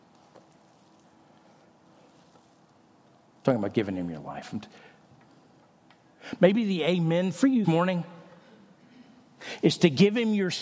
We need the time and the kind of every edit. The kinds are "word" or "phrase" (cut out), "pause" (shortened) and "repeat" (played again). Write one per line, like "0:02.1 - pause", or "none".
0:07.6 - word